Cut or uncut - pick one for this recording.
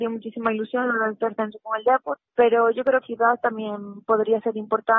cut